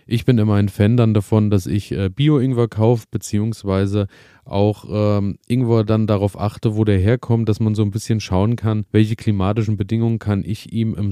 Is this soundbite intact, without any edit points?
no; 1 cut; at 8.9 s

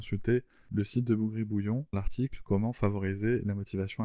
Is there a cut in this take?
yes; 1 cut; at 1.9 s

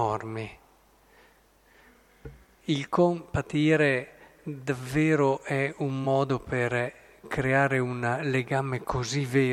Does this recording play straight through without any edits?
yes; 0 cuts

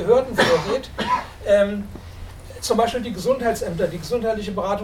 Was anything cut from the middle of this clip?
no; 0 cuts

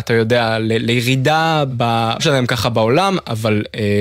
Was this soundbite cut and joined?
yes; 2 cuts; at 1.7 s, 2.2 s

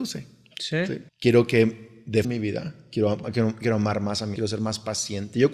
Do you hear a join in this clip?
yes; 4 cuts; at 1.1 s, 2.2 s, 3.2 s, 4.4 s

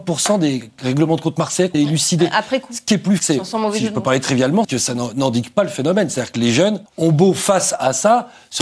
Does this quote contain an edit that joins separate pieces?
yes; 4 cuts; at 1.7 s, 3.2 s, 4.6 s, 6.9 s

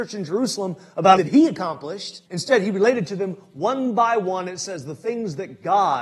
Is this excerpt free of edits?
no; 2 cuts; at 1.2 s, 2.3 s

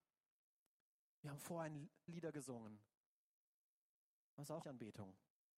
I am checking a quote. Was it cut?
yes; 2 cuts; at 2.1 s, 4.6 s

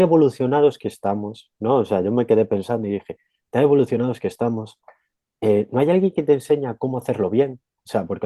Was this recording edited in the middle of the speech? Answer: no; 0 cuts

